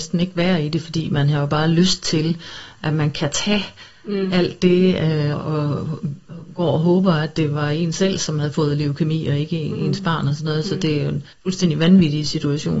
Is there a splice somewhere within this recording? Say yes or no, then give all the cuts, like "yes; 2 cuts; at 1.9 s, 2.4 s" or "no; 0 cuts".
yes; 2 cuts; at 5.3 s, 11.3 s